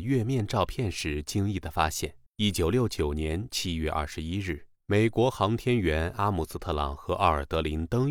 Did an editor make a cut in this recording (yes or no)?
yes